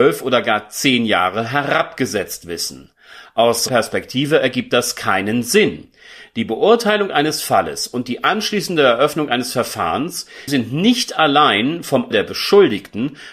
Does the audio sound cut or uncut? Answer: cut